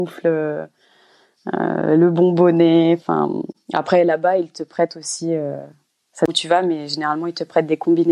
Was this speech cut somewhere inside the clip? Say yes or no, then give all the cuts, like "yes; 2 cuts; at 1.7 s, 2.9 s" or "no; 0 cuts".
no; 0 cuts